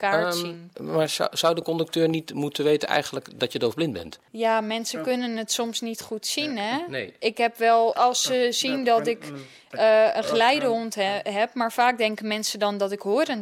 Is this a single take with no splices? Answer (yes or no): no